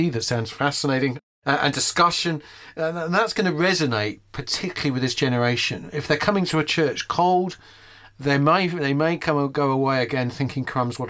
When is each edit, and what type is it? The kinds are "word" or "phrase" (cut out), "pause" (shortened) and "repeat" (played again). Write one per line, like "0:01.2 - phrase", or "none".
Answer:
none

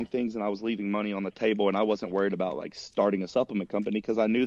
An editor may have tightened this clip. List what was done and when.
none

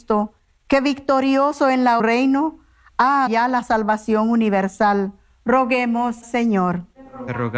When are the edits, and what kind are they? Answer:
0:02.0 - phrase
0:03.3 - word
0:06.2 - word

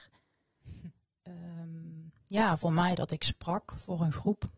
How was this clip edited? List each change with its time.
none

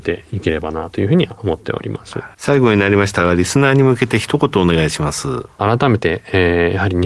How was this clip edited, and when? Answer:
0:02.3 - pause

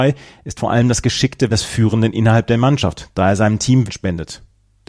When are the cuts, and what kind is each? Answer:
0:01.5 - word
0:03.9 - word

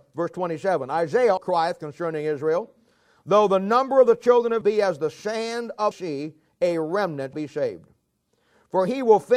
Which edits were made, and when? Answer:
0:01.4 - word
0:04.6 - word
0:05.9 - word
0:07.3 - word

